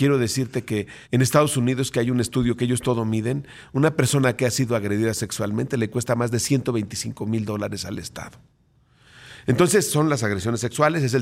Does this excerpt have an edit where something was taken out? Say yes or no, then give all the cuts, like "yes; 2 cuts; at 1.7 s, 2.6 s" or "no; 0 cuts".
yes; 1 cut; at 1.0 s